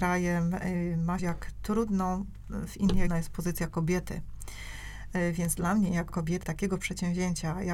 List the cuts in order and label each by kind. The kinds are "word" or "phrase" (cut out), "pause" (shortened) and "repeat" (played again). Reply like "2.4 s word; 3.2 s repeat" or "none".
1.2 s word; 3.1 s word; 6.1 s word; 6.4 s word